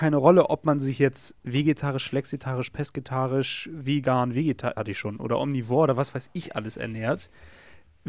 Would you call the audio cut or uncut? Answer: cut